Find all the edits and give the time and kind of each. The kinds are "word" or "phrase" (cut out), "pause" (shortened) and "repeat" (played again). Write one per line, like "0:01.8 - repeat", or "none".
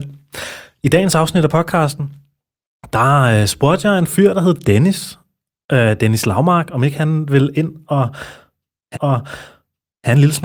0:08.9 - repeat